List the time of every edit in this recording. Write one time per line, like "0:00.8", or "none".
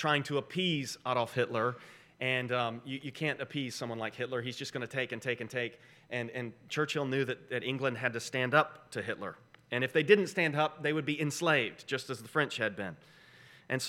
none